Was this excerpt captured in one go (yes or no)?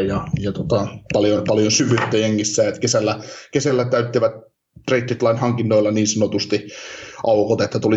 yes